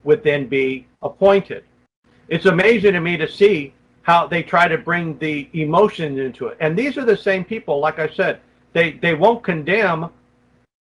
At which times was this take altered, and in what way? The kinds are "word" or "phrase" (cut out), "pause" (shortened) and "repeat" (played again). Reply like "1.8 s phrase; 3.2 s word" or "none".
0.9 s pause

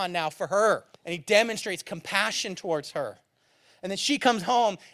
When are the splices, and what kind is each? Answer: 0.9 s pause

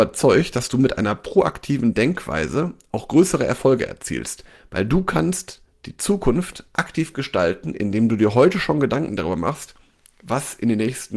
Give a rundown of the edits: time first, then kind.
none

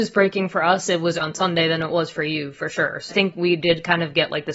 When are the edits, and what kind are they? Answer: 1.2 s word; 3.1 s word

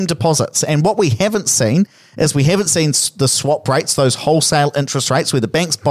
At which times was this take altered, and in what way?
none

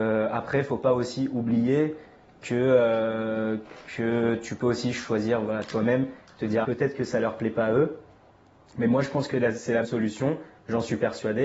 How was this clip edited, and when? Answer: 6.6 s word; 9.8 s word

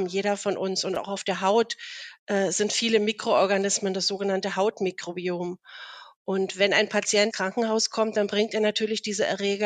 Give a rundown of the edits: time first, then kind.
7.3 s word

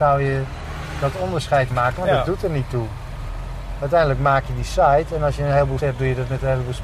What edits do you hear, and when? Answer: 1.7 s word; 5.8 s word

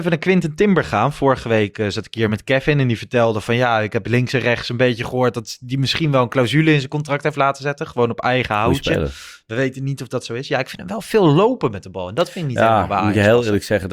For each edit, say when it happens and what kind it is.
none

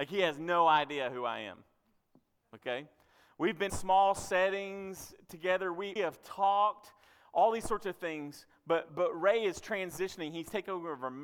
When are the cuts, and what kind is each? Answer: 3.7 s word; 6.0 s word; 8.9 s word

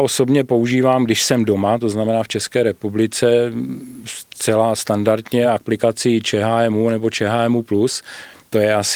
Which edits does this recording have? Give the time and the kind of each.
none

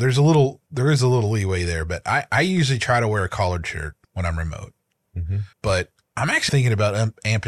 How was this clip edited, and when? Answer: 4.0 s pause; 5.5 s pause; 6.5 s word

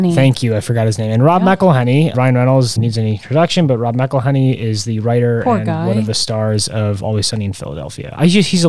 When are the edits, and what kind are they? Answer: 2.1 s word; 2.8 s phrase

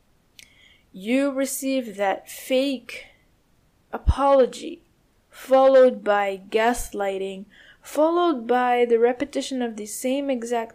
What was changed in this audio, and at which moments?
none

